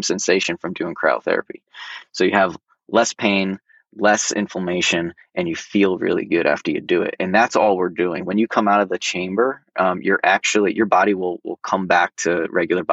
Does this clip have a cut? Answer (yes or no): no